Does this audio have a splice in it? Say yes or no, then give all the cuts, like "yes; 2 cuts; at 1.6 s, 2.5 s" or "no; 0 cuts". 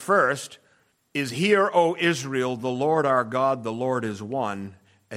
no; 0 cuts